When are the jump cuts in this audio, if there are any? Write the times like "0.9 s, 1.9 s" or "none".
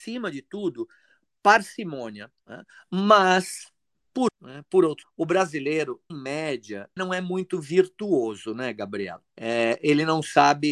2.4 s, 4.3 s, 5.0 s, 6.1 s, 7.0 s, 9.3 s